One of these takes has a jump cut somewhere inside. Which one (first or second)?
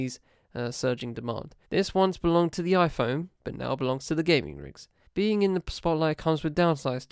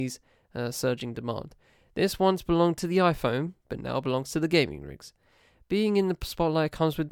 first